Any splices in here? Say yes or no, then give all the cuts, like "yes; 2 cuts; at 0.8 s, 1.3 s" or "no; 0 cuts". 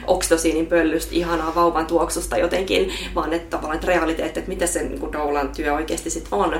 no; 0 cuts